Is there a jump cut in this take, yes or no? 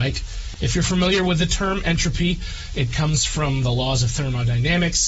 no